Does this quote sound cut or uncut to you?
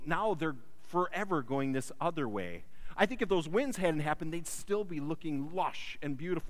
uncut